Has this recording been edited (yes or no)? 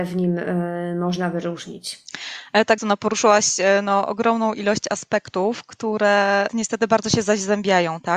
yes